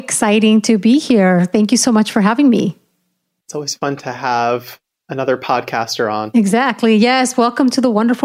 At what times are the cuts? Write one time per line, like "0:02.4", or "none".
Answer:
none

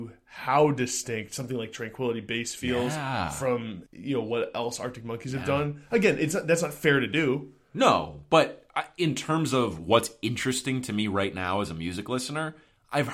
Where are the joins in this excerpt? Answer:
0:03.9

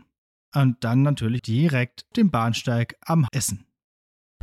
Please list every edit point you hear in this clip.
0:01.4
0:02.1
0:03.3

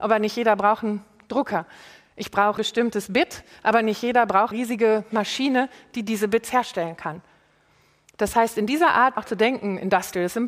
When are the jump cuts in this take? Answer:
0:02.6
0:04.5
0:09.2

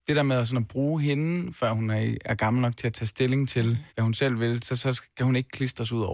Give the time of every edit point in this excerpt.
0:02.2
0:03.9

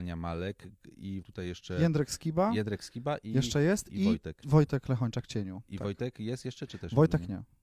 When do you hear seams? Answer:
0:01.2

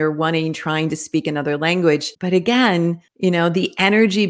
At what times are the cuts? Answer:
0:02.2
0:03.1

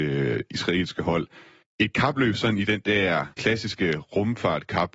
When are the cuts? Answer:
0:01.6
0:03.3

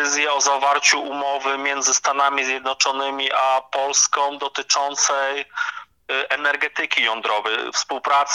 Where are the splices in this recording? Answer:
none

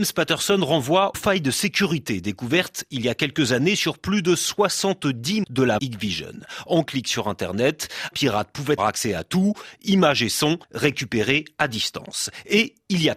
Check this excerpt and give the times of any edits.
0:01.1
0:05.4
0:05.8
0:06.9
0:08.1
0:08.8
0:10.6

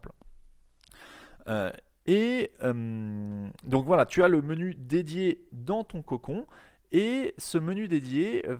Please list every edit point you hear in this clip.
none

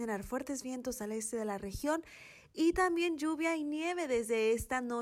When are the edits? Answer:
none

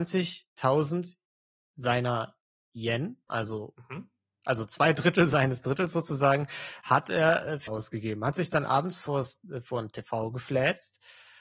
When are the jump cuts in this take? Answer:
0:07.7

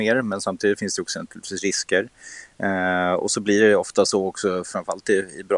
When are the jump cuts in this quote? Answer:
none

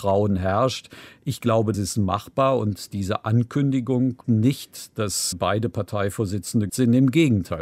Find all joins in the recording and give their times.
0:01.7
0:04.2
0:05.3
0:06.7

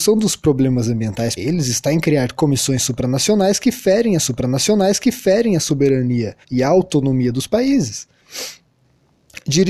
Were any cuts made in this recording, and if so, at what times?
0:01.4
0:04.2
0:06.4

